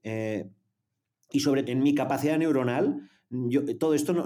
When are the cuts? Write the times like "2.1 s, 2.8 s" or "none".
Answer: 1.6 s